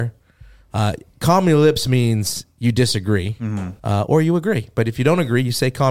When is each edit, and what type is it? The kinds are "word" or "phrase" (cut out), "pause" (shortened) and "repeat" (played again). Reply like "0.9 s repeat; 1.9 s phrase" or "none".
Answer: 3.8 s pause